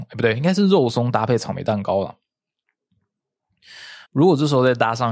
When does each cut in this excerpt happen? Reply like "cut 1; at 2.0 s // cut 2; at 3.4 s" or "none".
cut 1; at 4.0 s